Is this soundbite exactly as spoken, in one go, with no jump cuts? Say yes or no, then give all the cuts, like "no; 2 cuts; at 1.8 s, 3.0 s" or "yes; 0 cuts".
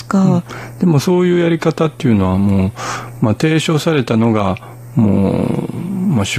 yes; 0 cuts